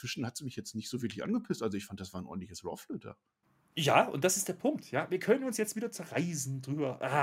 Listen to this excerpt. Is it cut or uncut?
cut